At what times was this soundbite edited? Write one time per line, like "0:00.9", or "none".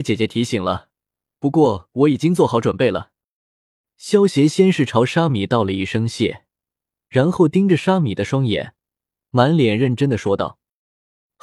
none